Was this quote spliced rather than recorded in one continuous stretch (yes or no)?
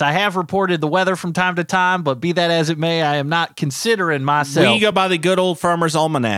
no